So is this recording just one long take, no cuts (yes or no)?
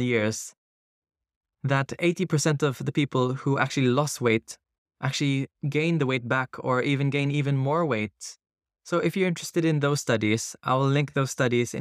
yes